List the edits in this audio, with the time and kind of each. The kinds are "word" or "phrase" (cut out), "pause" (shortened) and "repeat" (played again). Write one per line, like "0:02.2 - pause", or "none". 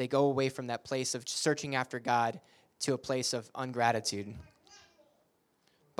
none